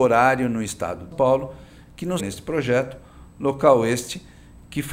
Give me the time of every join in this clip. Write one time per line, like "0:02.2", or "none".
0:01.1
0:02.2